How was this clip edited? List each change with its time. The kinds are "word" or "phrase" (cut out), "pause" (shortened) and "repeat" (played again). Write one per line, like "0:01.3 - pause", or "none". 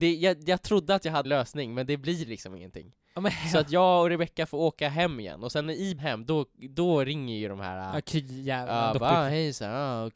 0:01.2 - word
0:06.0 - word